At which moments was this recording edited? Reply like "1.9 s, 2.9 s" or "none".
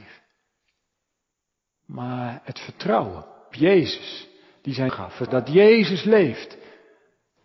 3.5 s, 4.9 s, 5.3 s